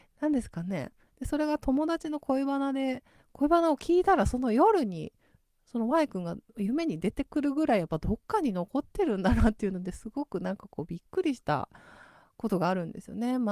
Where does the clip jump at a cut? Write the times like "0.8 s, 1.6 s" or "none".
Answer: none